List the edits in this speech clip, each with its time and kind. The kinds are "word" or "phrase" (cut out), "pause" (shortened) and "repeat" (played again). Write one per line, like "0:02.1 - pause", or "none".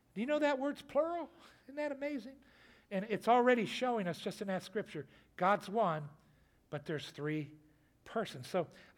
none